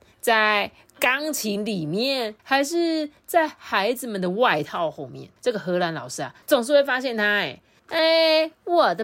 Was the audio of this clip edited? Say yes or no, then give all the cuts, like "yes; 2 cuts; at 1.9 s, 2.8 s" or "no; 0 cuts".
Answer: yes; 4 cuts; at 2.4 s, 5.4 s, 6.4 s, 7.8 s